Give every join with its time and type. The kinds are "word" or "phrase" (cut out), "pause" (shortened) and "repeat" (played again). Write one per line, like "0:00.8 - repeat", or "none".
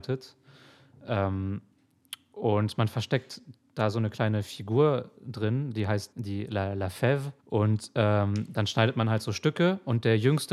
0:06.1 - word
0:07.4 - pause

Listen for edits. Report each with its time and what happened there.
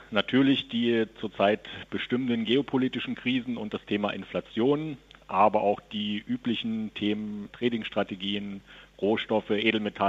none

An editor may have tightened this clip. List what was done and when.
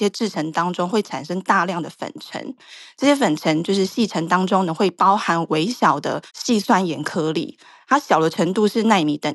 0:06.3 - pause

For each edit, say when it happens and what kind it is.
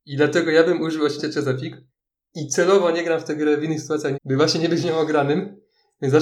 0:01.2 - word
0:01.9 - pause
0:04.1 - phrase

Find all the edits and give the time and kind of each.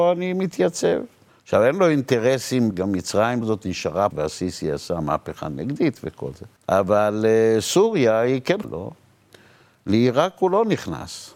0:01.3 - pause
0:02.7 - word
0:03.4 - word
0:04.1 - word
0:06.6 - pause
0:08.6 - word

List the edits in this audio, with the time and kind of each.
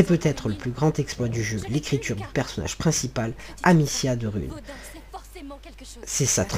none

